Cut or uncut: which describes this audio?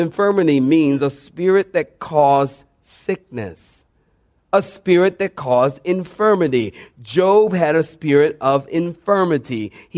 uncut